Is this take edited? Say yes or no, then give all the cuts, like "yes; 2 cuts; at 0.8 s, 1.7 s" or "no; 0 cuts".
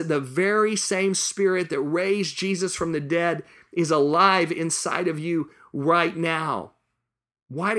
no; 0 cuts